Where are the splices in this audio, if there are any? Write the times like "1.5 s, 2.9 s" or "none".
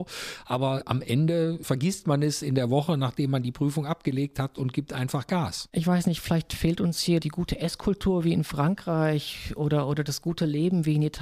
none